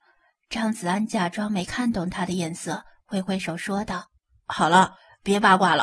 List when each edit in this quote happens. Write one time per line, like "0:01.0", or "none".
0:04.2